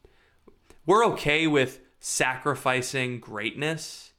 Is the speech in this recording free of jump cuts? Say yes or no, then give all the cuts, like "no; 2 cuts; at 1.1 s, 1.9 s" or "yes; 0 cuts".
yes; 0 cuts